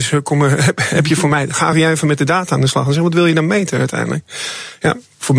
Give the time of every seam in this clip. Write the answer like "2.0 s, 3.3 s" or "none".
none

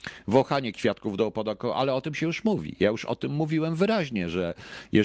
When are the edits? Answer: none

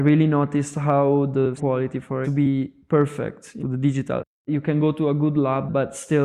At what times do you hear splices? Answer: 1.6 s, 2.2 s, 3.6 s

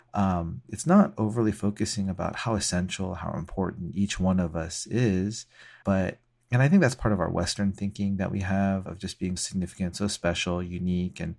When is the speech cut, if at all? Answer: 5.8 s, 8.8 s, 9.4 s

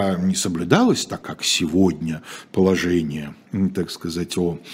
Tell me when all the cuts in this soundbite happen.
1.2 s

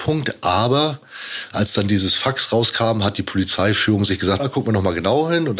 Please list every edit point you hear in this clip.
4.4 s

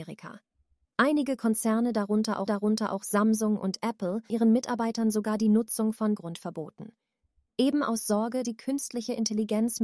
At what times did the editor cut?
2.5 s, 4.3 s, 6.2 s, 8.4 s

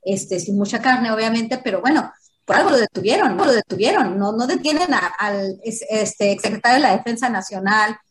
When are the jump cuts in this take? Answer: 3.4 s

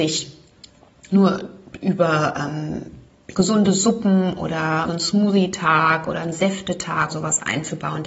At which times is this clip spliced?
1.1 s, 3.3 s, 4.9 s, 7.1 s

